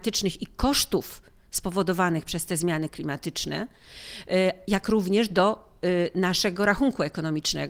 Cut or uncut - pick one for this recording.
uncut